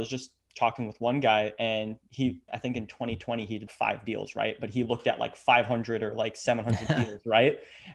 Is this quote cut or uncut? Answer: cut